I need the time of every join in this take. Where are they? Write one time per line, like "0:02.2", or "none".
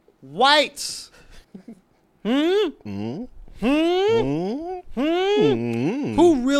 0:01.4